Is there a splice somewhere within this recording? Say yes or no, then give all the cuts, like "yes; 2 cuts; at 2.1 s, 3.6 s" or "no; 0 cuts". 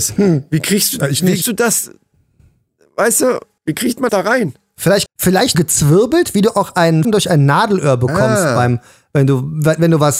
yes; 6 cuts; at 1.4 s, 3.6 s, 4.1 s, 5.1 s, 5.5 s, 7.0 s